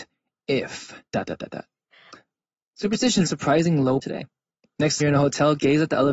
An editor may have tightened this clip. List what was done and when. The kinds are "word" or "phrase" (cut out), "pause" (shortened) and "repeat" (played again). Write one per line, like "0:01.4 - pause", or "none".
0:01.1 - pause
0:03.3 - word
0:04.0 - word
0:05.0 - word